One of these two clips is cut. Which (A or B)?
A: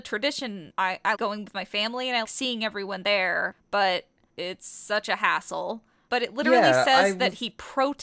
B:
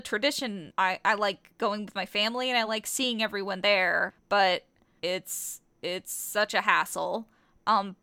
A